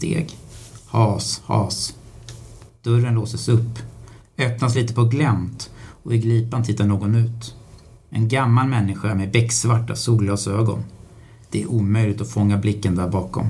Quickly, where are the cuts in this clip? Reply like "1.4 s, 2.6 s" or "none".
none